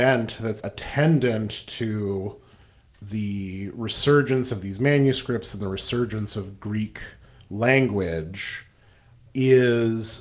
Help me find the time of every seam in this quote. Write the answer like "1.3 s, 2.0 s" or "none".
7.3 s